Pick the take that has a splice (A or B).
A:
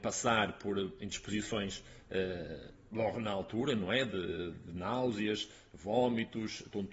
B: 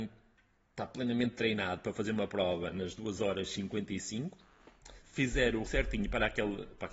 B